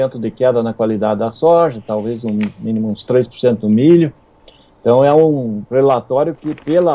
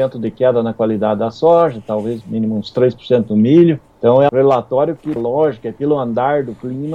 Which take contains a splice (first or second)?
second